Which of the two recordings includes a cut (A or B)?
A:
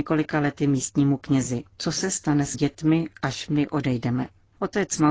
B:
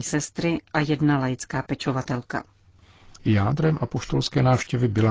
A